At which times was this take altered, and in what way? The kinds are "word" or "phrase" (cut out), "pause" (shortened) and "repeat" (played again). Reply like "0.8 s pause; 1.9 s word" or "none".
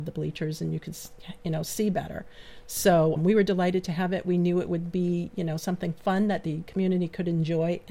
3.2 s word

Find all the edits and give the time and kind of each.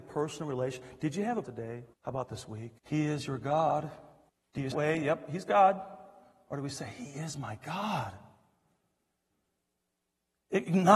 1.4 s phrase; 1.9 s pause; 2.8 s pause; 4.3 s pause; 4.7 s phrase

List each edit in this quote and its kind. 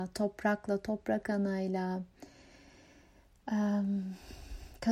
none

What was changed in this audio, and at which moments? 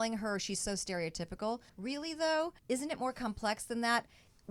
1.7 s pause; 2.6 s pause

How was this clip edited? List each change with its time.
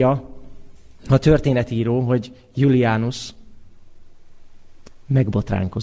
none

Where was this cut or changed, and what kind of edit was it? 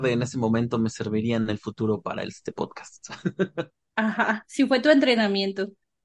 none

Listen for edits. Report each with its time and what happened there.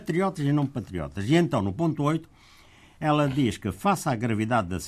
none

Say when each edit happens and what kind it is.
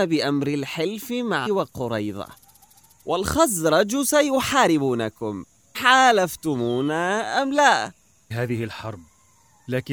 1.5 s word; 5.7 s word; 8.3 s word

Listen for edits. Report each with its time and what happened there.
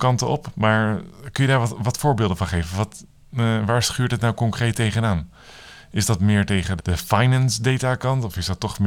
6.8 s word

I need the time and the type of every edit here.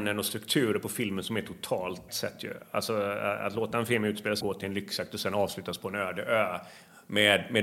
2.1 s phrase; 4.4 s word

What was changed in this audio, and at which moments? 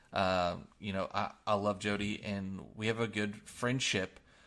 none

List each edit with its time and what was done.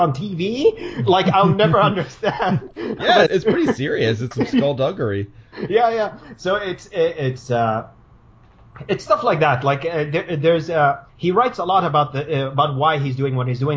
3.3 s word; 4.3 s word; 11.1 s pause

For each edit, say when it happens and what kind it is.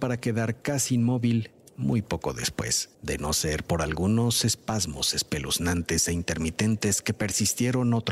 2.9 s pause

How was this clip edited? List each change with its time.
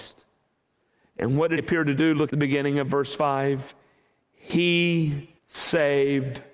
1.6 s word; 2.3 s word; 5.4 s pause

